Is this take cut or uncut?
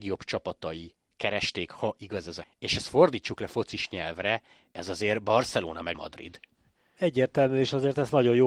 cut